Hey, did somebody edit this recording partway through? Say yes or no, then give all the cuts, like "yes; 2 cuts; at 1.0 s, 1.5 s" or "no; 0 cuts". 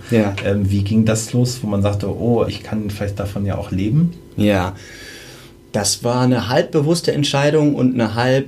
yes; 1 cut; at 2.5 s